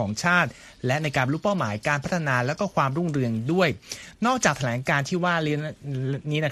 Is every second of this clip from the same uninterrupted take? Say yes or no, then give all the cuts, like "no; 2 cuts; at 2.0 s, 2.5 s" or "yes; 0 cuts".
yes; 0 cuts